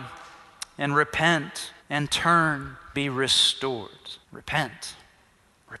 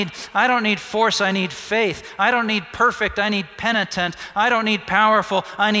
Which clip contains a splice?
first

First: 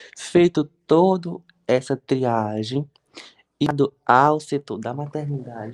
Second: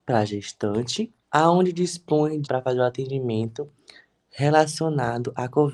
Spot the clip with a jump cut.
second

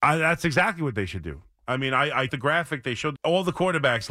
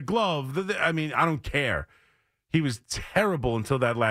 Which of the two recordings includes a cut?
first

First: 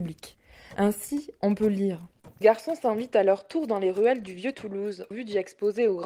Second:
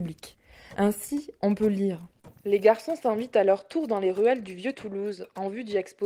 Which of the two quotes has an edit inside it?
first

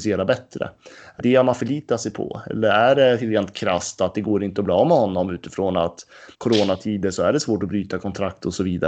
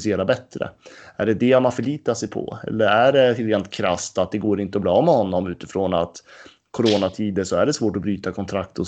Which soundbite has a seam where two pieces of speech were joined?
first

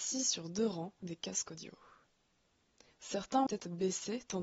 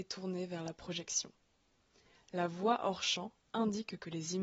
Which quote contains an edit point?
first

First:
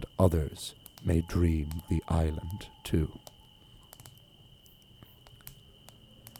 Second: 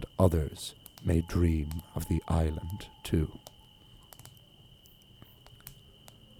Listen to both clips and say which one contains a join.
first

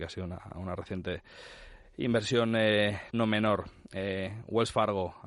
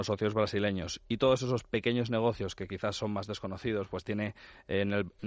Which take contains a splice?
first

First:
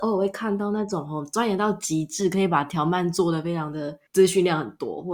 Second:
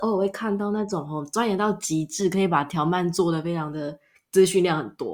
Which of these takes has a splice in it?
first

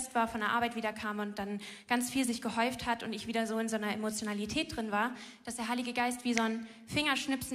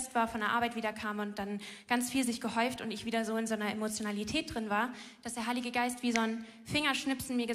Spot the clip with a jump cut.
second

